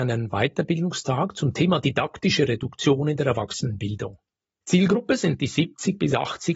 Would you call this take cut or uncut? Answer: uncut